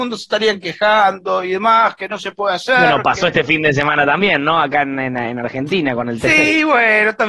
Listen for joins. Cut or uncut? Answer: uncut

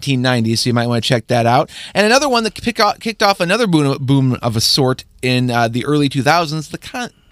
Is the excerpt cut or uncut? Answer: uncut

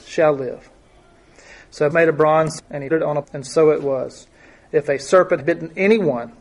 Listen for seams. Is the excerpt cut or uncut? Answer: cut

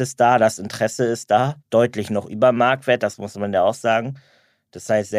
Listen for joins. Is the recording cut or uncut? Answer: cut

